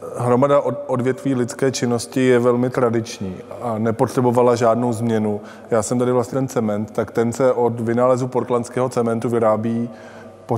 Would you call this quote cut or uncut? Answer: cut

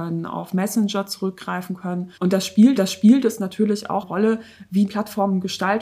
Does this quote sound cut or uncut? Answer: cut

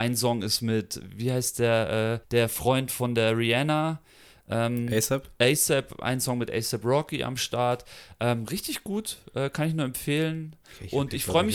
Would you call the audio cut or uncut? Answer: cut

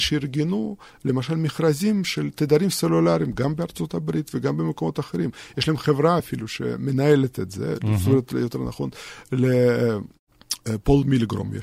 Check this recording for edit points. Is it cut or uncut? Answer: uncut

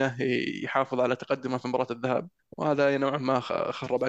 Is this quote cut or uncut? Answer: cut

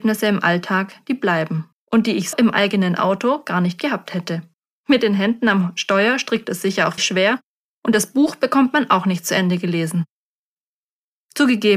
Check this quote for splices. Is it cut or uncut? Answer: cut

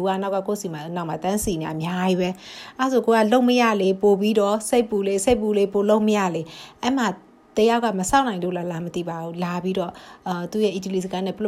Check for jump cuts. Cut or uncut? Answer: uncut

